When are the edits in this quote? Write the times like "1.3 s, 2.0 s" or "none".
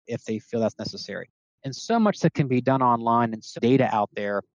1.8 s, 3.6 s

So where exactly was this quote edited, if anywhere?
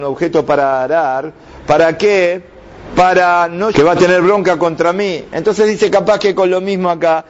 3.7 s

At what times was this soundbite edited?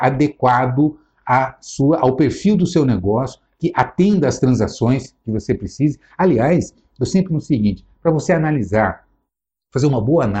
7.3 s

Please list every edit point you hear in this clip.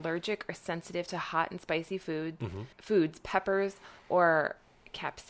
2.7 s, 4.0 s

